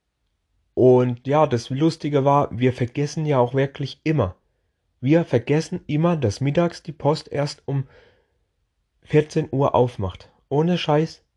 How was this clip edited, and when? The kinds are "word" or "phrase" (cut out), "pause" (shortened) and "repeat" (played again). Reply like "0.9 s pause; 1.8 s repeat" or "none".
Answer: none

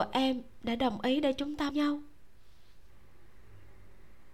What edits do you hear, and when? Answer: 1.7 s word

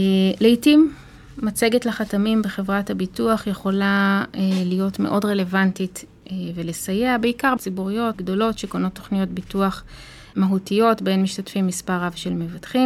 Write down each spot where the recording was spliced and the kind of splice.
7.6 s word; 8.1 s word; 10.3 s word

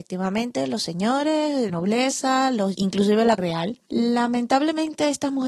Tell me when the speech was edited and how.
1.7 s word; 2.7 s word; 3.4 s word

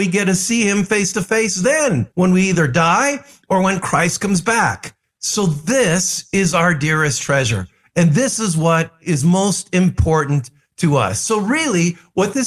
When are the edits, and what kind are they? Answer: 2.1 s pause

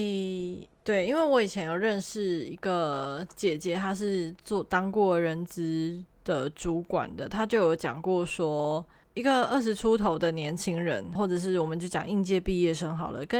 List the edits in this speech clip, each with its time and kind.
11.2 s word

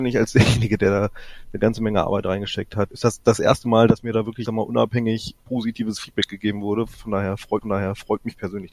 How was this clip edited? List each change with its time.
2.9 s word; 4.5 s word; 7.6 s repeat

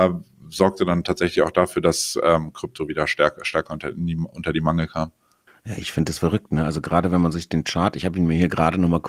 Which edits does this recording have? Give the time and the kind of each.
5.5 s pause

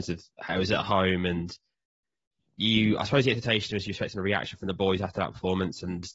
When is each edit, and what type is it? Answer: none

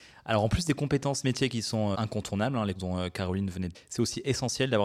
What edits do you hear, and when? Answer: 1.9 s word; 2.8 s word; 3.7 s word

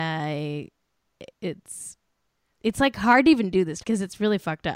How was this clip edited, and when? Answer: 1.3 s word; 3.8 s word

